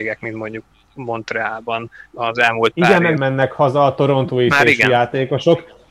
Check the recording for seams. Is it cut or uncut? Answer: cut